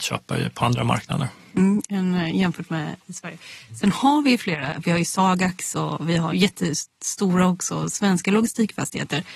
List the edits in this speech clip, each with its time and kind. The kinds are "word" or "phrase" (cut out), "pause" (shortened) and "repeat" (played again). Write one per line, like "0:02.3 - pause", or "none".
0:06.3 - word